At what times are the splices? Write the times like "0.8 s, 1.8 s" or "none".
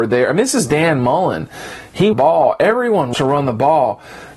2.1 s, 3.1 s